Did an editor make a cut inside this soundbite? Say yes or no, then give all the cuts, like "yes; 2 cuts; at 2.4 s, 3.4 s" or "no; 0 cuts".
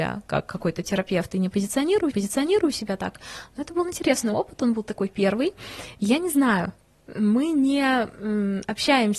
yes; 1 cut; at 2.1 s